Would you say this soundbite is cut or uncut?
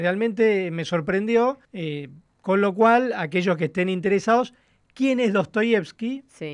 cut